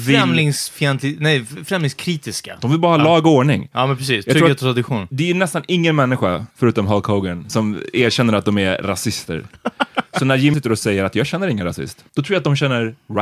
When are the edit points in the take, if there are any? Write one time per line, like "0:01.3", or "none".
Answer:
0:06.5
0:07.5
0:10.5
0:12.1